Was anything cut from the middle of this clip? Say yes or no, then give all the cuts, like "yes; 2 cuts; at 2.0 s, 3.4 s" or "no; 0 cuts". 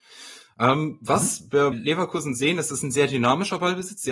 yes; 1 cut; at 1.7 s